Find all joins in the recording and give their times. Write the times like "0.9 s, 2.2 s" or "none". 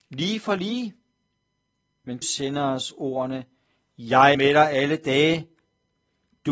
2.2 s, 4.3 s

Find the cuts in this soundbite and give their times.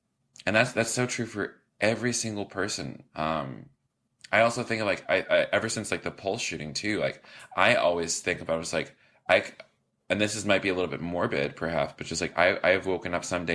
1.7 s, 3.1 s

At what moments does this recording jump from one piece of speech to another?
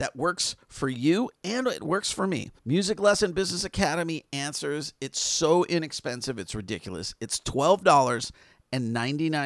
2.6 s

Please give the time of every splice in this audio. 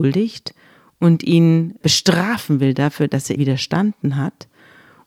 1.8 s, 3.4 s

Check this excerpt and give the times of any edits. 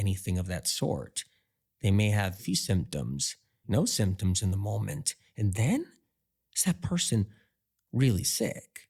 2.4 s, 3.6 s

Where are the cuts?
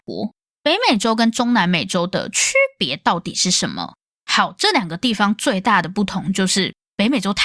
none

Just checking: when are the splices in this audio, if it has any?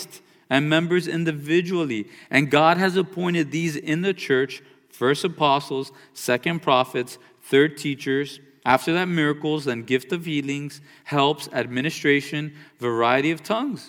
none

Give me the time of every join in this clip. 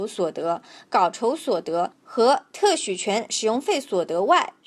2.0 s

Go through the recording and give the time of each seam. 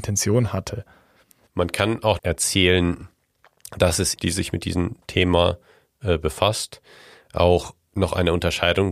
2.2 s, 4.2 s

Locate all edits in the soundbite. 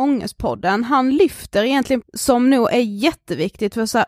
2.0 s

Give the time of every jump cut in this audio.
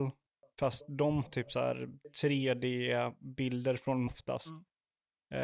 1.3 s, 4.1 s

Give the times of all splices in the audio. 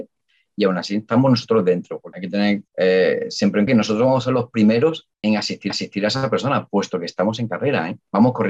2.1 s, 2.7 s, 3.7 s, 5.1 s, 5.7 s

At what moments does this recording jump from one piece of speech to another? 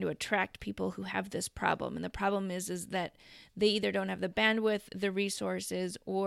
none

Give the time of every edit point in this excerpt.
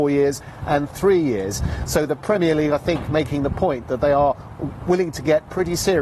none

